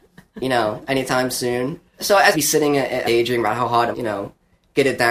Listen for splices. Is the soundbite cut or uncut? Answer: cut